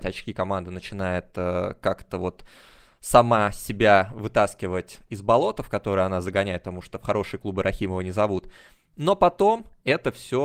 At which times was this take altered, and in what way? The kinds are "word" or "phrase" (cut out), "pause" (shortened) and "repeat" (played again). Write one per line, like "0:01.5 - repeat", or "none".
none